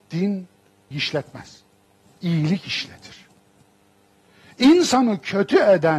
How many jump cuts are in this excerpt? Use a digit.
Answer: 1